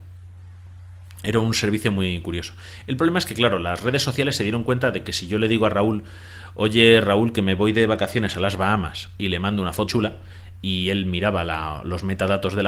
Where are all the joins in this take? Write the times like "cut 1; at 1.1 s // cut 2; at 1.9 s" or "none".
cut 1; at 9.9 s